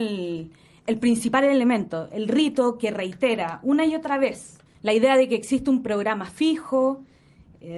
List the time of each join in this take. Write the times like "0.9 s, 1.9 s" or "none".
4.7 s